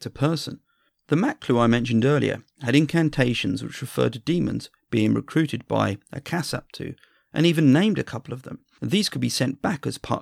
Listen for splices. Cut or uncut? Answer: uncut